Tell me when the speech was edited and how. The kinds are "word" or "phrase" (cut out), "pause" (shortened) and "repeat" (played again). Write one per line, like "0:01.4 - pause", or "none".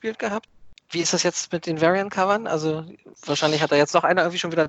none